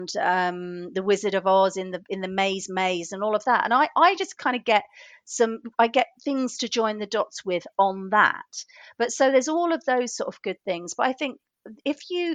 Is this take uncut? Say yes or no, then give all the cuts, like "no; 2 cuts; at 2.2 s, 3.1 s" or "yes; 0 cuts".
yes; 0 cuts